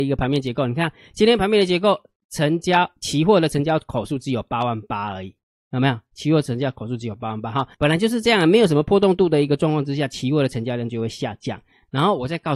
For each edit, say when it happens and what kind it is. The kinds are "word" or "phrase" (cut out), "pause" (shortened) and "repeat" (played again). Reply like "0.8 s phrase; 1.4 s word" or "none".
7.7 s pause